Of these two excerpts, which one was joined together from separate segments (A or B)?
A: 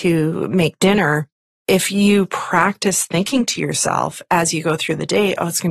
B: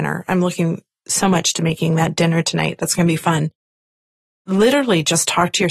A